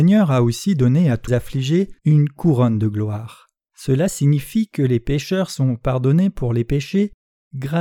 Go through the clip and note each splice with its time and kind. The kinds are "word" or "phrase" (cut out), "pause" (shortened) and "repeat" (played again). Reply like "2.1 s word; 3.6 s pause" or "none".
1.3 s word; 2.0 s pause; 3.6 s pause